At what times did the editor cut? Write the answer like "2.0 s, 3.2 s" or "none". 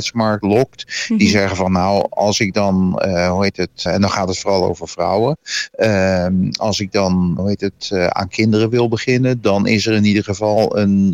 3.9 s, 7.4 s